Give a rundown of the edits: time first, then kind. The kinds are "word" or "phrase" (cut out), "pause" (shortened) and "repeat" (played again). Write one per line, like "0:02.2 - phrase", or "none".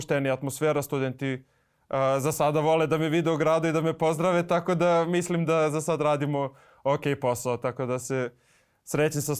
none